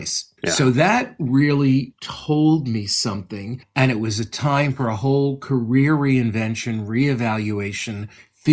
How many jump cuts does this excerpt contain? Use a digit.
0